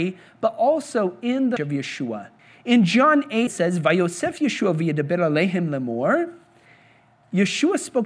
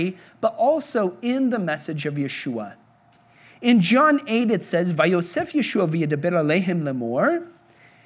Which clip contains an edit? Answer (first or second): first